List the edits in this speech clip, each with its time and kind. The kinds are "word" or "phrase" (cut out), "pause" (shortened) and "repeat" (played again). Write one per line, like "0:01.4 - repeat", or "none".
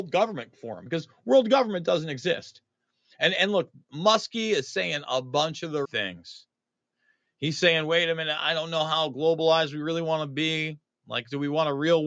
0:05.8 - word